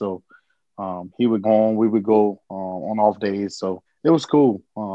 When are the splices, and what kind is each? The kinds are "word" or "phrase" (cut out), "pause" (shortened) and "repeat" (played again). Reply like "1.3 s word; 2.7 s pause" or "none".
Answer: 1.4 s word; 2.4 s pause; 3.9 s pause

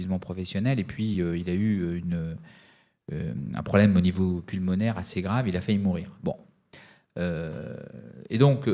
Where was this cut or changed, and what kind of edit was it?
none

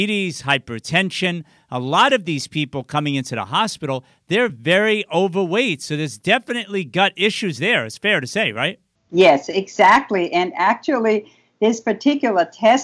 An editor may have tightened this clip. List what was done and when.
none

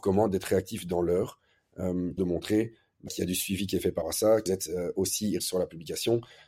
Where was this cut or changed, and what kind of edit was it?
2.2 s word; 3.1 s word; 4.0 s word; 4.5 s word; 5.4 s word

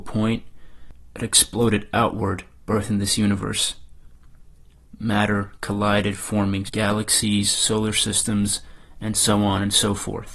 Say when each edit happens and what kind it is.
6.6 s word

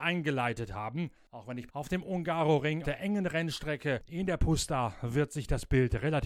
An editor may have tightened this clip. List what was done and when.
1.7 s phrase; 2.8 s word

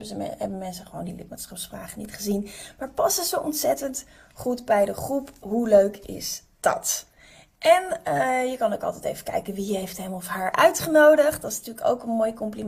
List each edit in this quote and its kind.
none

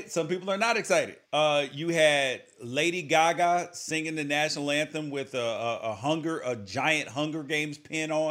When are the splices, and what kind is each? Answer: 1.2 s pause

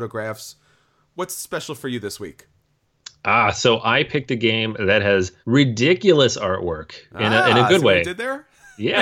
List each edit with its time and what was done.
5.4 s pause

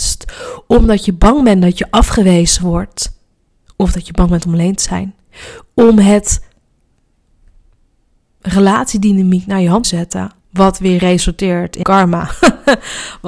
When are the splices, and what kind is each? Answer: 9.8 s phrase; 10.4 s pause; 11.8 s word

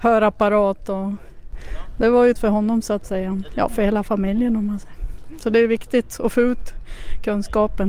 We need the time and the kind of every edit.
2.4 s word

